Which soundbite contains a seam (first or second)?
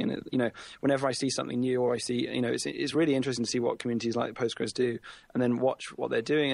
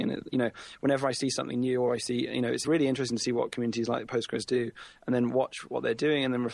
second